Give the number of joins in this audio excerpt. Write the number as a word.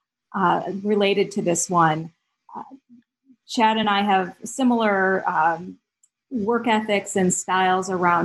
zero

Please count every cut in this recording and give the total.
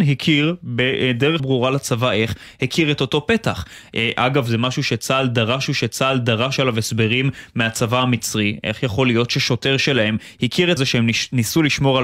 three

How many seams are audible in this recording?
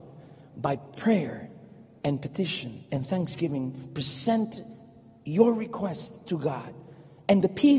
one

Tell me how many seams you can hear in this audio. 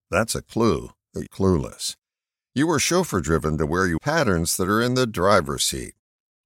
two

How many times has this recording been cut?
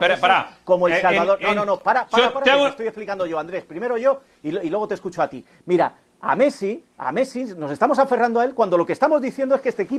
zero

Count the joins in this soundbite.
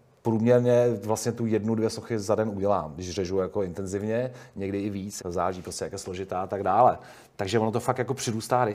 one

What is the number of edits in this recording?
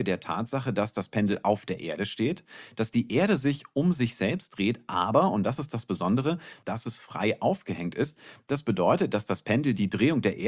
zero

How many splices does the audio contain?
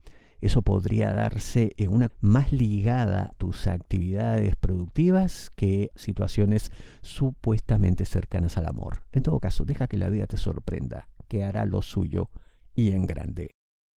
three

